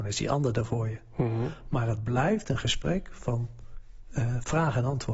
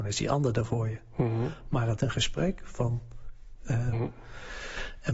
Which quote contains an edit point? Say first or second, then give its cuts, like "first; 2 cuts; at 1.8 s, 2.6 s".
second; 2 cuts; at 2.0 s, 3.9 s